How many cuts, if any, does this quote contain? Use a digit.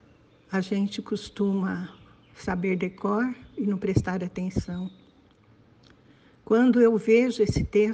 0